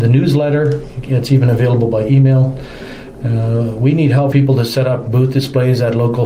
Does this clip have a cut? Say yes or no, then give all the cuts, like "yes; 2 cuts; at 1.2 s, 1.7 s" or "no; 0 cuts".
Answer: yes; 1 cut; at 4.3 s